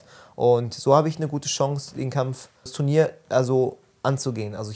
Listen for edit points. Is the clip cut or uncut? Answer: cut